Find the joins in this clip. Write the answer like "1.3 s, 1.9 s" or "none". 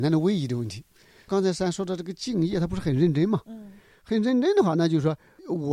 none